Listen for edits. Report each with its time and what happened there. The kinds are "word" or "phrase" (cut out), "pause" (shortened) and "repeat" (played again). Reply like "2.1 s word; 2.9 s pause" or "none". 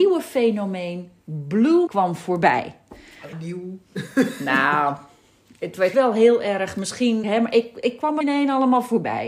1.9 s word; 3.3 s word; 5.9 s word; 7.2 s word; 8.2 s word